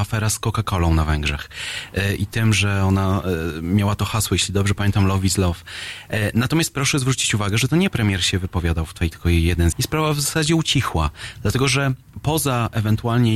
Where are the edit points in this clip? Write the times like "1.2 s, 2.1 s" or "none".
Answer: 9.1 s, 9.7 s